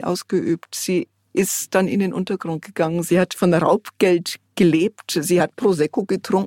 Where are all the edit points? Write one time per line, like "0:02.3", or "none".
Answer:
none